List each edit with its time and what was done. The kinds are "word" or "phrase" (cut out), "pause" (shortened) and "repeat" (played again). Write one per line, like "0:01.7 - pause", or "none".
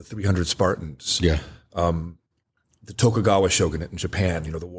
0:02.4 - pause